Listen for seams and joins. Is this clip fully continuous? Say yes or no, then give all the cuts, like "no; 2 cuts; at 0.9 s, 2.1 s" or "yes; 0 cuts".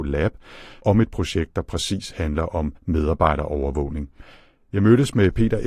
no; 1 cut; at 2.8 s